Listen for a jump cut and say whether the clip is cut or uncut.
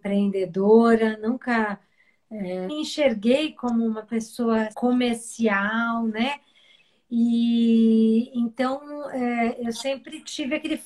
cut